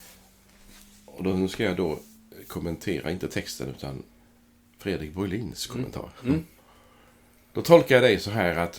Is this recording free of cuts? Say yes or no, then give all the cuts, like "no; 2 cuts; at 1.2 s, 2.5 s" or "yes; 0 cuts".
yes; 0 cuts